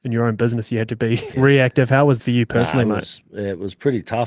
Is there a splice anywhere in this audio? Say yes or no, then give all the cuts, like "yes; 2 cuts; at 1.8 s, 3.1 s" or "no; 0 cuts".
yes; 2 cuts; at 1.3 s, 2.2 s